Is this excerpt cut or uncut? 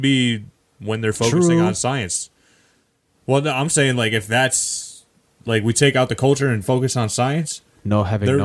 uncut